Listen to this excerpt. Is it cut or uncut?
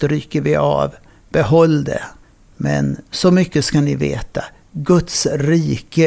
uncut